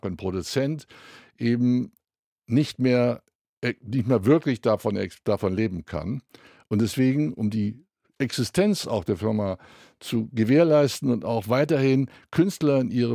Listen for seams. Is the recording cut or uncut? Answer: uncut